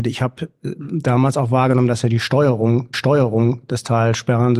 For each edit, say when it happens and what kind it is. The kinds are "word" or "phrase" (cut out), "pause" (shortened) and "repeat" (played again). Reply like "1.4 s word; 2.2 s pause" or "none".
2.9 s repeat